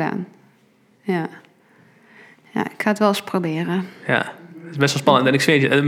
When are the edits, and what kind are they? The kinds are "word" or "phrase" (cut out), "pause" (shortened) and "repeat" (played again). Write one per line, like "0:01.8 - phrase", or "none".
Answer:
none